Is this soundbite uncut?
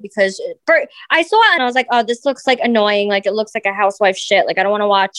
no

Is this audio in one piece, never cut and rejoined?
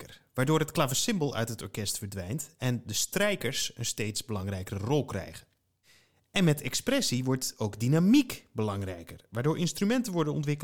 yes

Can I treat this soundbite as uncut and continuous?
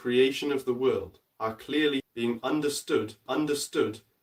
no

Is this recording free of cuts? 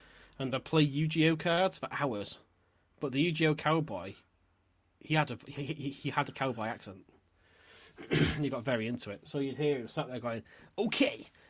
yes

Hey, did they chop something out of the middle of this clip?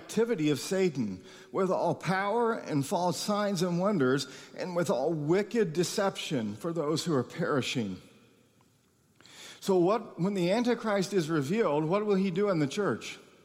no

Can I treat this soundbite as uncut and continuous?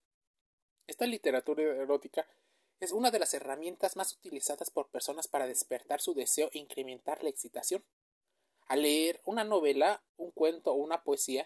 yes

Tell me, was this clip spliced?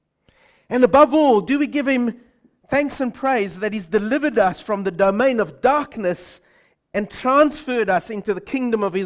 no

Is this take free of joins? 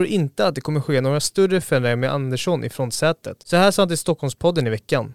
no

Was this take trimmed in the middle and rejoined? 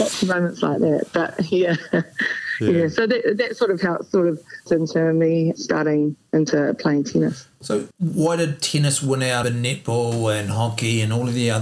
yes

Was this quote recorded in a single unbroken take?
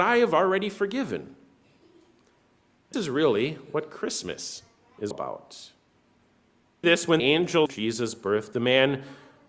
no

